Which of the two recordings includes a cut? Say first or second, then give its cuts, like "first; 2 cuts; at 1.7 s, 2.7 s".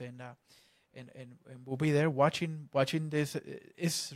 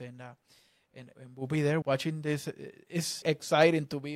second; 3 cuts; at 1.1 s, 1.8 s, 3.2 s